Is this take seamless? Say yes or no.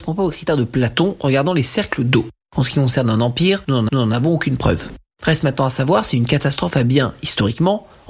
no